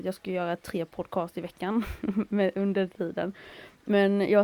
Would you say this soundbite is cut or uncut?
uncut